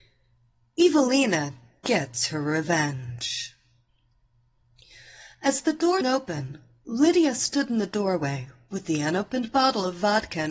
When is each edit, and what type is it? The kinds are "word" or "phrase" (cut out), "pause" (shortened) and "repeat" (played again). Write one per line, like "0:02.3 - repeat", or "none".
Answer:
0:06.0 - word